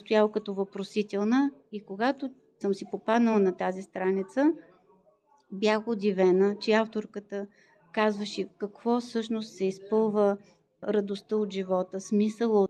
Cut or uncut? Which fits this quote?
uncut